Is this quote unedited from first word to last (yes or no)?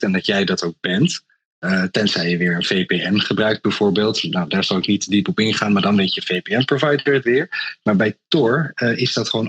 yes